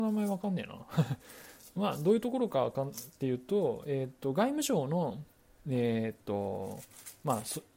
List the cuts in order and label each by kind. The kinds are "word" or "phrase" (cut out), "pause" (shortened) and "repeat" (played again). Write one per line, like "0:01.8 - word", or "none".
none